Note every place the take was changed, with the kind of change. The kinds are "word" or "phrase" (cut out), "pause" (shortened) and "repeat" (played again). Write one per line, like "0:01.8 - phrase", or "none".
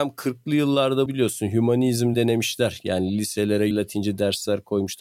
0:01.1 - word
0:02.1 - word
0:03.7 - word